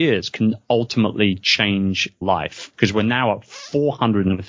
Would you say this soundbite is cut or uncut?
cut